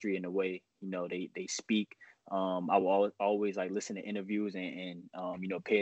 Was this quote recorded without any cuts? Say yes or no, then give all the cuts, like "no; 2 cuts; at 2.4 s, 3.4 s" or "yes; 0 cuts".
yes; 0 cuts